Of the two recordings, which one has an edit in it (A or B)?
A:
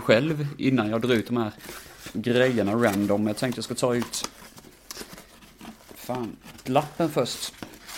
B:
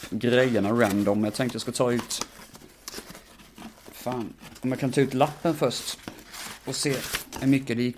A